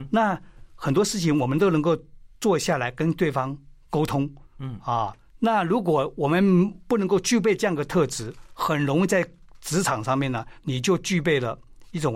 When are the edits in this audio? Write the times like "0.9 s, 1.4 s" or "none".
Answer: 4.5 s